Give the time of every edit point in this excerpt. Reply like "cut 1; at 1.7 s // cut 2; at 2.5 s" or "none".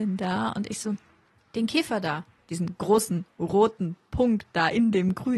none